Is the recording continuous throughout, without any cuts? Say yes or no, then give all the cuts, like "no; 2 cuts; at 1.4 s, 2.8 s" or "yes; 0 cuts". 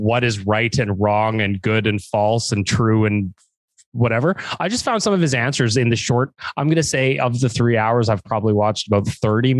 yes; 0 cuts